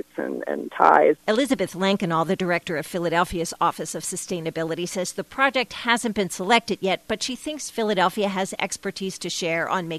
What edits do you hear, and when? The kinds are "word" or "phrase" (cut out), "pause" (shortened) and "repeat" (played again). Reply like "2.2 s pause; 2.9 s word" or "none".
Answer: none